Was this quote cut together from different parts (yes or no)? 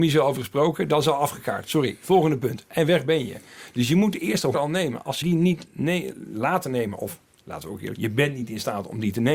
yes